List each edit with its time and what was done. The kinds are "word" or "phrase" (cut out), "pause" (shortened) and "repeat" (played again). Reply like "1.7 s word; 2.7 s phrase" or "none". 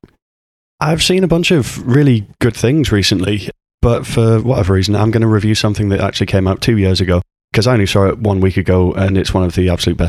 none